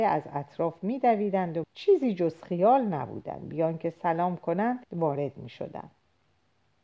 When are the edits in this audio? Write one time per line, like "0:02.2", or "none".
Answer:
0:01.6
0:04.8